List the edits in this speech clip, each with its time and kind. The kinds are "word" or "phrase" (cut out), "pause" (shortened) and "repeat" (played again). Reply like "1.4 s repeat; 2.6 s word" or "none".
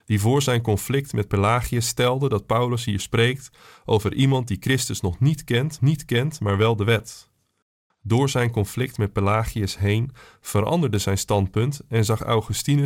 5.8 s repeat